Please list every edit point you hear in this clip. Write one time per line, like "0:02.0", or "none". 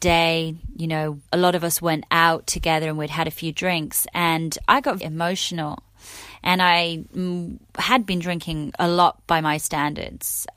0:01.3
0:05.0